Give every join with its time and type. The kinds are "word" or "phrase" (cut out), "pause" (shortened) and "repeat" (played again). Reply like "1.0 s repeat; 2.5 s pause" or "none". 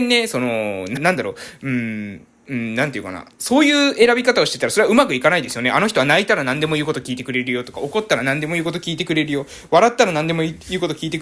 1.0 s word; 2.4 s pause